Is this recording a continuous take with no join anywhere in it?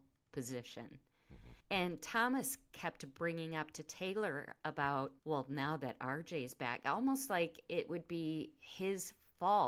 no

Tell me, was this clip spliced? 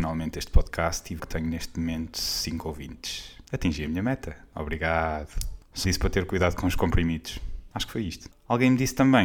yes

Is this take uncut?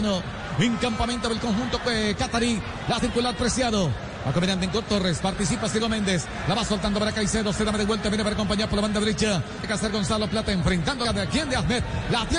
no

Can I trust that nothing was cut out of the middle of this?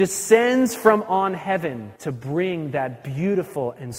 no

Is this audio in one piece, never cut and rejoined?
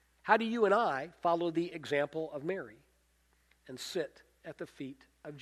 yes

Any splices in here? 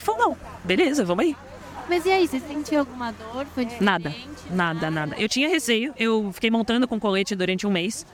no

